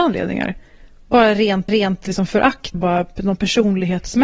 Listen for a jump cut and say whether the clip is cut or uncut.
cut